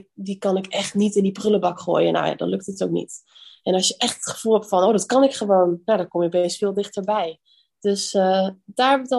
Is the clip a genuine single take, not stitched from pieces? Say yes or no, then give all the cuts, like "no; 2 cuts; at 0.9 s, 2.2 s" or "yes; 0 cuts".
yes; 0 cuts